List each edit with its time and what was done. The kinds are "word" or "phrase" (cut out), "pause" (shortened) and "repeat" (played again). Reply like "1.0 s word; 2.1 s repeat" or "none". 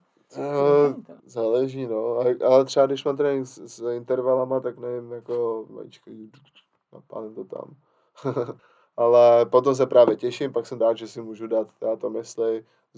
1.2 s pause; 5.7 s phrase; 8.6 s pause; 10.8 s word